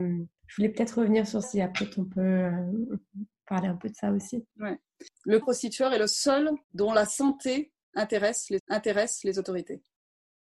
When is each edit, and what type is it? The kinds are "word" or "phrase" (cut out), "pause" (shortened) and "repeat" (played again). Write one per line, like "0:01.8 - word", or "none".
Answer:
0:01.4 - word
0:04.5 - pause
0:05.4 - word
0:06.6 - pause
0:08.6 - repeat